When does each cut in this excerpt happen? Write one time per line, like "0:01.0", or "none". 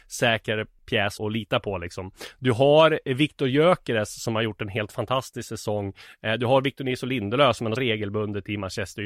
0:01.2
0:07.8